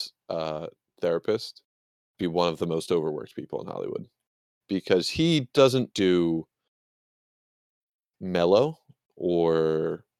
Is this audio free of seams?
no; 3 cuts; at 2.2 s, 4.6 s, 5.9 s

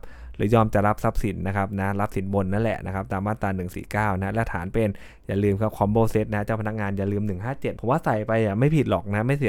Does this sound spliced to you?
yes; 1 cut; at 7.8 s

